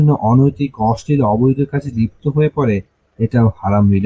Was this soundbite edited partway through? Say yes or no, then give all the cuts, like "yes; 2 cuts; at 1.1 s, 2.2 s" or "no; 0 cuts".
no; 0 cuts